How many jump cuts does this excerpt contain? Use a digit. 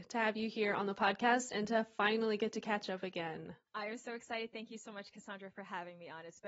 1